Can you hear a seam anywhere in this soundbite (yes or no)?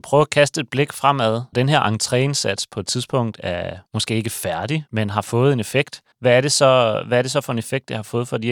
yes